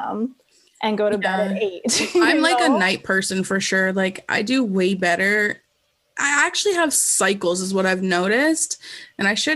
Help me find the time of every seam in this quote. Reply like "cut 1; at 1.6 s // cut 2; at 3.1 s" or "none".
none